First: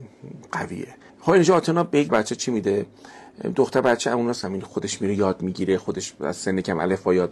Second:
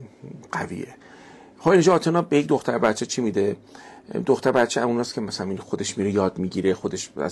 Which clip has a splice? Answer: first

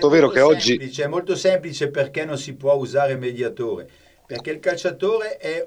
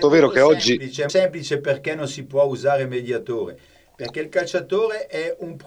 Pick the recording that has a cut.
second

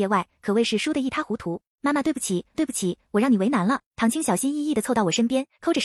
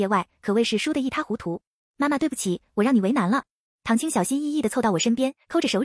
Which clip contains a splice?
first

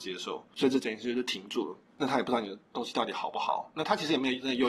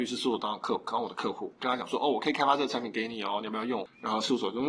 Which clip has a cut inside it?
first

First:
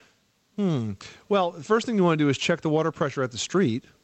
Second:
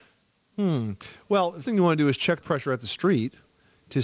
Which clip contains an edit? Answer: second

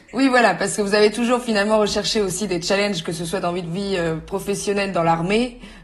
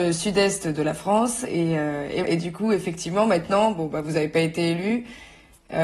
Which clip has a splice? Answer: second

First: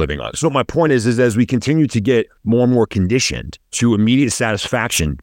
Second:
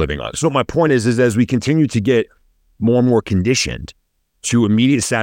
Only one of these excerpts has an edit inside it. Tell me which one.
first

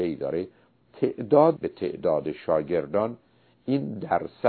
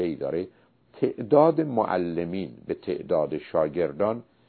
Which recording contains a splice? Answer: first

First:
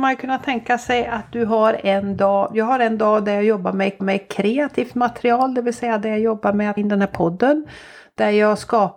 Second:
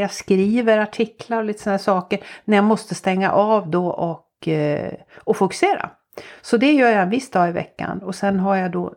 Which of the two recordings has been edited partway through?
first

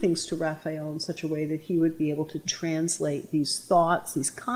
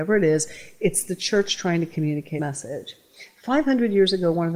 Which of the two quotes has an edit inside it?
second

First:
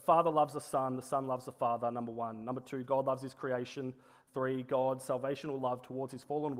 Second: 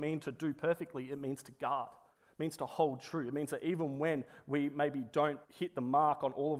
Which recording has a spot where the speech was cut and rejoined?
second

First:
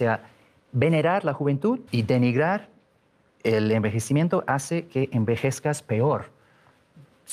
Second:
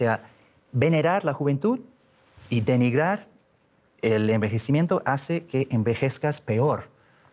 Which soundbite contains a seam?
first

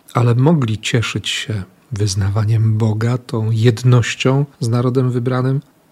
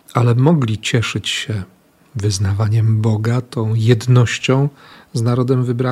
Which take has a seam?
first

